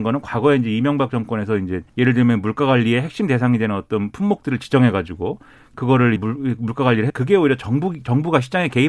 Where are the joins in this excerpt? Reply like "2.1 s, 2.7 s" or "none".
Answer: 1.9 s, 6.2 s, 7.1 s

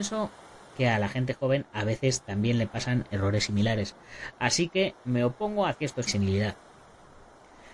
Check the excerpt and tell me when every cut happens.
5.0 s, 5.7 s, 6.1 s

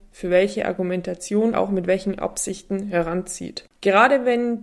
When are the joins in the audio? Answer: 1.5 s

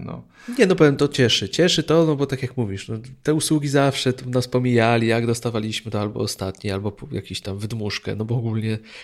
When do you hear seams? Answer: none

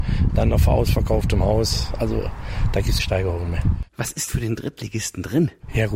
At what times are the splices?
3.0 s, 4.3 s

